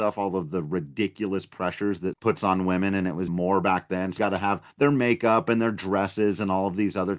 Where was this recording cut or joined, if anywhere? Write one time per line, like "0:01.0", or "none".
0:02.1
0:03.3
0:04.2
0:04.7